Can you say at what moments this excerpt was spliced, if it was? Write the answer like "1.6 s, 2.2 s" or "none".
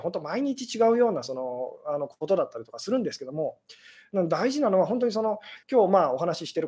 5.6 s